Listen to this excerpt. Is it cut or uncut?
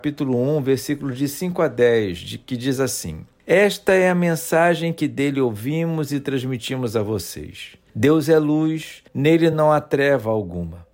uncut